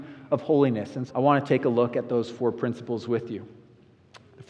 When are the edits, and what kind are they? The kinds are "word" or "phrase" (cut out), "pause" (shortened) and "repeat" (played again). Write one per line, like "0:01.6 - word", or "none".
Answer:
0:01.1 - word